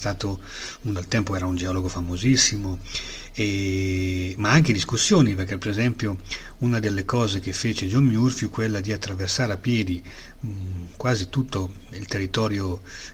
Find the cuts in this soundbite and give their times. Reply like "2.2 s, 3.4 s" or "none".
1.0 s, 11.9 s